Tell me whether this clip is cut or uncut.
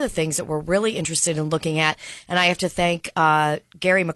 uncut